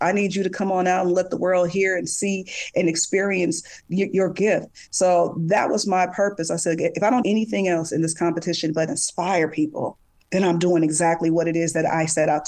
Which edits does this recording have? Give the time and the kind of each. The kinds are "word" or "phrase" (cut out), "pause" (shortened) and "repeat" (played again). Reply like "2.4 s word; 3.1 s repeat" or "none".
7.2 s word